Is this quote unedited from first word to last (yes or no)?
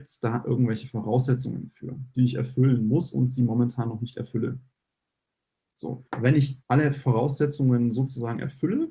no